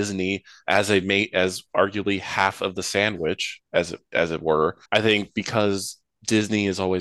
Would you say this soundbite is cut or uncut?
cut